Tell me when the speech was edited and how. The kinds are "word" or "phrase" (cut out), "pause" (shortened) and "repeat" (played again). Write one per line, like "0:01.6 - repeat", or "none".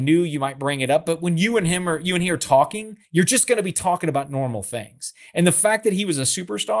0:03.0 - pause